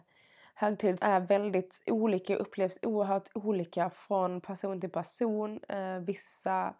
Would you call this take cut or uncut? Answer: cut